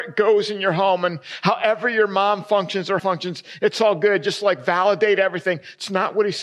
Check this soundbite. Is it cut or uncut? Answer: cut